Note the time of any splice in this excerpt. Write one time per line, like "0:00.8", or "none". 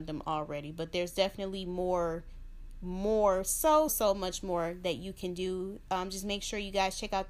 0:03.9